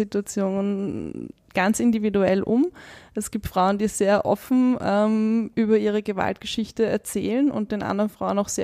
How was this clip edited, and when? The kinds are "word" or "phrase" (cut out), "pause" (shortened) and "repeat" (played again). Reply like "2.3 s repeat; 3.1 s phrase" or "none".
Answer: none

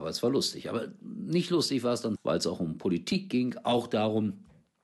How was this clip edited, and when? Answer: 2.2 s word

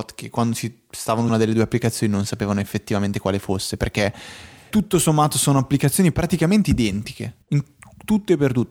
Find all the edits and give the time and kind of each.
1.3 s word; 4.7 s word; 7.4 s pause

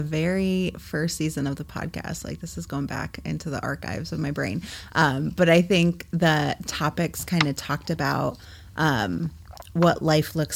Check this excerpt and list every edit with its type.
none

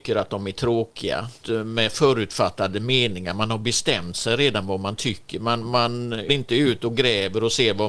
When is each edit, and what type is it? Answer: 1.4 s word; 6.3 s word

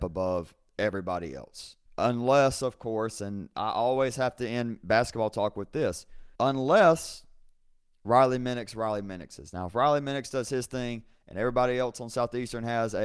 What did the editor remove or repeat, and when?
1.9 s pause; 6.3 s pause

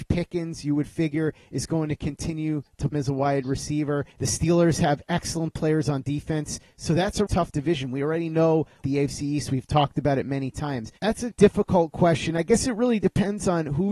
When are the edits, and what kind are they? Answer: 2.9 s word; 4.1 s pause; 7.3 s word; 8.8 s phrase; 11.0 s pause; 11.3 s word

